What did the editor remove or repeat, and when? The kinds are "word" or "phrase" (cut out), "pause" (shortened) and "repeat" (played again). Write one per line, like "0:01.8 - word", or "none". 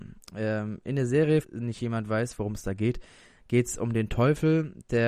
0:01.4 - word